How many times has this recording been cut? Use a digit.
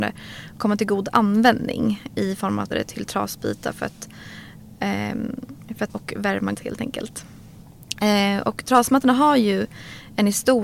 3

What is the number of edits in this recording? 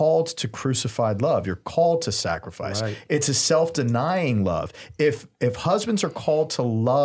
0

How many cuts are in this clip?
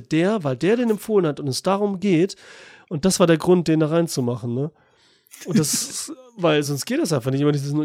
0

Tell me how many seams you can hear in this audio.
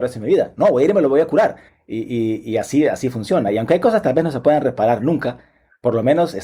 1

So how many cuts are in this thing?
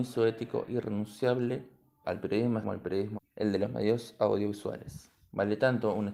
3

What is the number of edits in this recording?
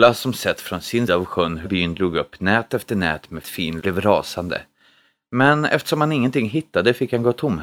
4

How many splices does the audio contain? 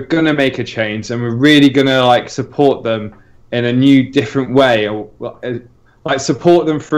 0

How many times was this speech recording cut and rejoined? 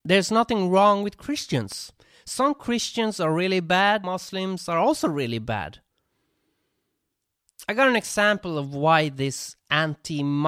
1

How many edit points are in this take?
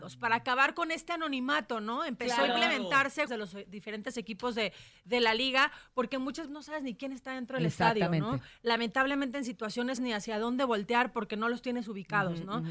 3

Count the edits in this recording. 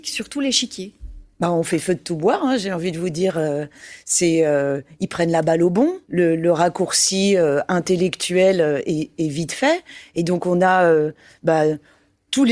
1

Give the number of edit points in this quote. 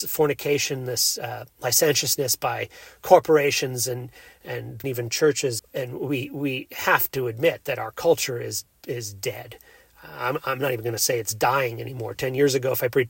2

